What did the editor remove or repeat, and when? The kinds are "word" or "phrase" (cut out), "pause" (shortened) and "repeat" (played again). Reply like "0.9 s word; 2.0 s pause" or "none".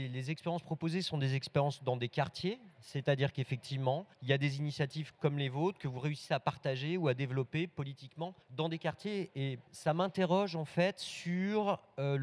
4.1 s pause; 8.4 s pause; 9.7 s pause